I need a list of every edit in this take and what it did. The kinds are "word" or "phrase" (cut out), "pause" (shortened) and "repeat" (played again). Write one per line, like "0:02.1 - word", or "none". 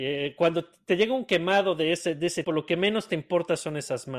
0:02.4 - word